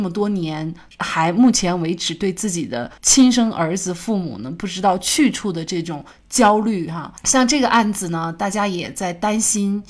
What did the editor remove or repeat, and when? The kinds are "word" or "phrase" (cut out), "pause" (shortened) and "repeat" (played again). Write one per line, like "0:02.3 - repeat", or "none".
0:03.0 - pause